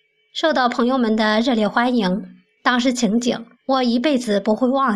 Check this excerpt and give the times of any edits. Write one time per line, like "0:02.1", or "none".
0:03.5